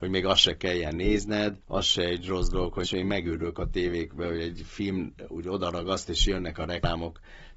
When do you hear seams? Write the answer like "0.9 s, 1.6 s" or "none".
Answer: 1.6 s, 2.8 s